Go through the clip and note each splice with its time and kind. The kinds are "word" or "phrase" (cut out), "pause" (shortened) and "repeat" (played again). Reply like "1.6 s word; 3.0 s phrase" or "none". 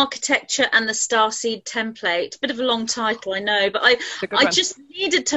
none